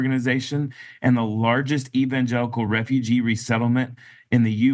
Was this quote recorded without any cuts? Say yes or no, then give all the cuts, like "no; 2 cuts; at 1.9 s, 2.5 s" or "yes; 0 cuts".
yes; 0 cuts